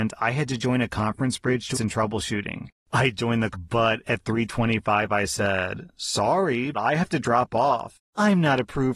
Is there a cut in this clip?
yes; 4 cuts; at 1.7 s, 3.5 s, 4.0 s, 6.7 s

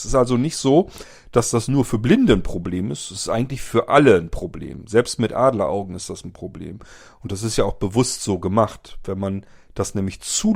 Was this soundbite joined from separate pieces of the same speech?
no; 0 cuts

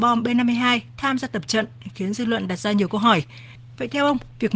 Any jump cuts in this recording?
no; 0 cuts

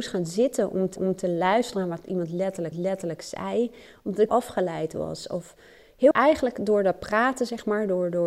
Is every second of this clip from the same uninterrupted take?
no; 4 cuts; at 1.0 s, 2.7 s, 4.3 s, 6.1 s

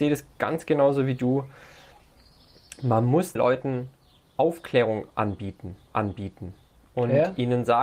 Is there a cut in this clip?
yes; 2 cuts; at 3.4 s, 5.9 s

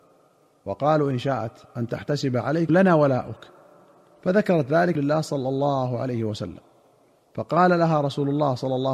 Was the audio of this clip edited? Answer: yes; 2 cuts; at 2.7 s, 4.9 s

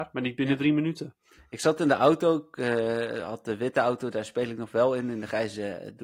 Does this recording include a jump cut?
no; 0 cuts

